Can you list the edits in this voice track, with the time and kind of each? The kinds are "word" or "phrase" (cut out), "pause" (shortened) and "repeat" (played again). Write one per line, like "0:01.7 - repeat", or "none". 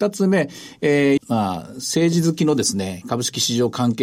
0:01.2 - phrase